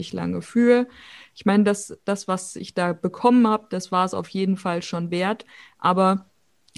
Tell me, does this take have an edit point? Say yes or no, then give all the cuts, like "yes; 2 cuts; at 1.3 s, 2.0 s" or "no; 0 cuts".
no; 0 cuts